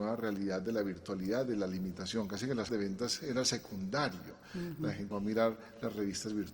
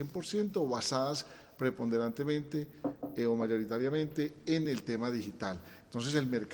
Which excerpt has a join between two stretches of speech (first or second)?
first